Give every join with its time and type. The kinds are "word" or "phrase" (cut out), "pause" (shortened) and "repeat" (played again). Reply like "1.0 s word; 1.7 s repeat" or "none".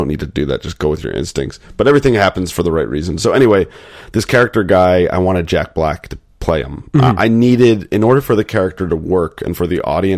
none